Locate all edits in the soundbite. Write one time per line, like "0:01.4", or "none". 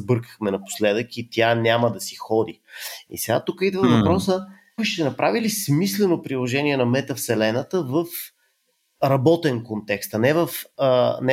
0:04.8